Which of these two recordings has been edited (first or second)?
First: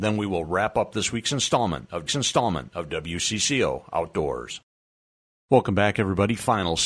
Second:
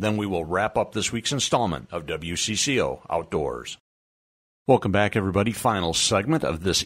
first